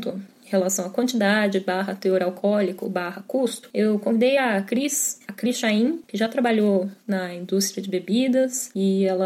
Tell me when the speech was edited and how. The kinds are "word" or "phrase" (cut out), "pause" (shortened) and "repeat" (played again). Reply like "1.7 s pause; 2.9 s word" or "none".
none

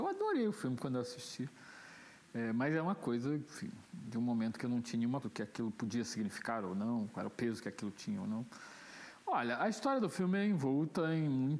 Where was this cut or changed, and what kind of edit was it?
3.9 s pause; 5.2 s word

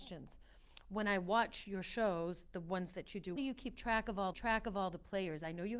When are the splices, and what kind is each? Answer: 3.4 s phrase; 4.3 s repeat

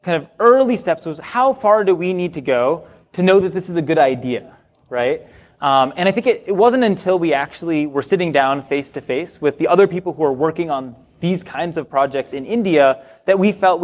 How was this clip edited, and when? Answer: none

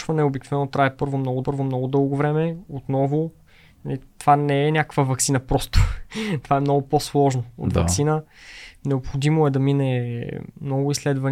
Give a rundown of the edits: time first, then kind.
1.4 s repeat

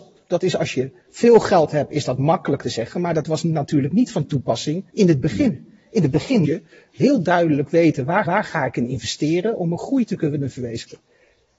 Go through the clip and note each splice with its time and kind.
1.0 s pause; 4.9 s pause; 6.4 s word; 8.2 s repeat

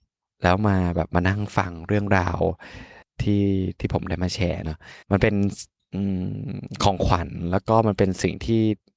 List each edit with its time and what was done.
3.0 s pause; 5.0 s pause; 5.8 s pause

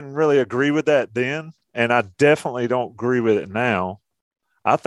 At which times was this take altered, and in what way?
none

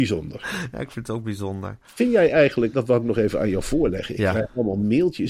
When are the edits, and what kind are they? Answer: 2.7 s word

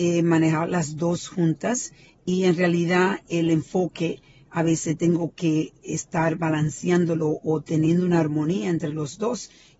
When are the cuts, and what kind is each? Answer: none

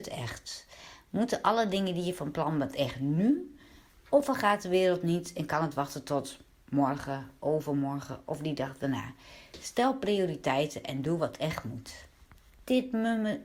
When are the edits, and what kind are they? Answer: none

